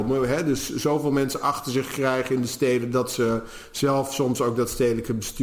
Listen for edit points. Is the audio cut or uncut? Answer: uncut